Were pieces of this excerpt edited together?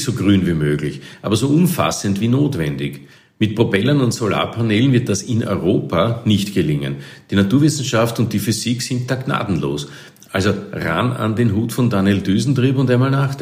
no; 0 cuts

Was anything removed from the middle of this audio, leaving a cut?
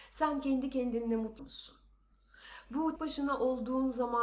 yes; 2 cuts; at 1.4 s, 3.0 s

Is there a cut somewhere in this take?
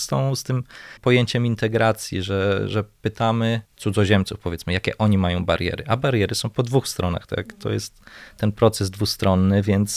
yes; 2 cuts; at 1.0 s, 3.6 s

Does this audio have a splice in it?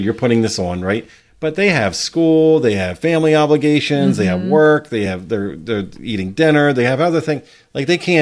no; 0 cuts

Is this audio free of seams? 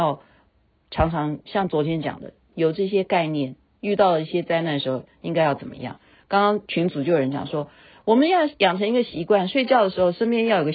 yes; 0 cuts

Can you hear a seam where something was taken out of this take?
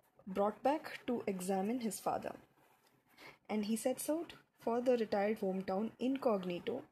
yes; 2 cuts; at 3.4 s, 5.4 s

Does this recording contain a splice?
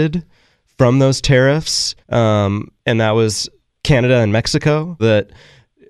yes; 2 cuts; at 2.0 s, 5.0 s

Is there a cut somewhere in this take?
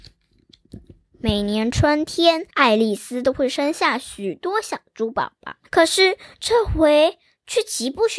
yes; 2 cuts; at 2.5 s, 5.6 s

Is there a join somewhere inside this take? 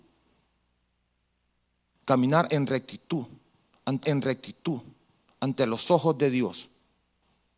yes; 1 cut; at 4.0 s

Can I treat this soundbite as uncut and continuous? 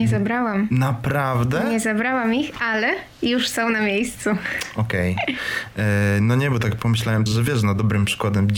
no; 1 cut; at 7.3 s

